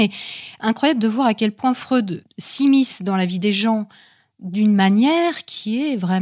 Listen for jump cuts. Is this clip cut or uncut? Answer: uncut